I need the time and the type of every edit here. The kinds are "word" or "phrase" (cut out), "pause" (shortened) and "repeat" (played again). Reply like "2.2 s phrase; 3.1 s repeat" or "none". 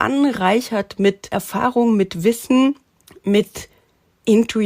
3.0 s pause